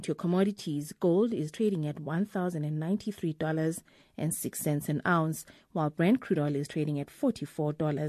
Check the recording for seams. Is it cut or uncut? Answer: uncut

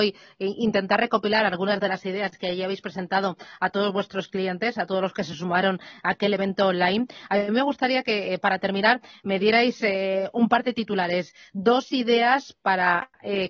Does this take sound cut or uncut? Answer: uncut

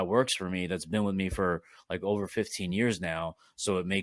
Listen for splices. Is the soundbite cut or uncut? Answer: uncut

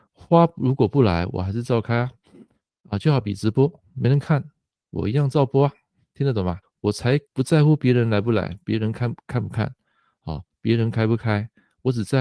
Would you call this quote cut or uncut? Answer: cut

